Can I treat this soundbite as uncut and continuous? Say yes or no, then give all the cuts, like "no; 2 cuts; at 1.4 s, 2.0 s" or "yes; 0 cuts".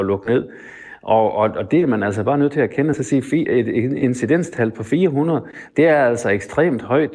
yes; 0 cuts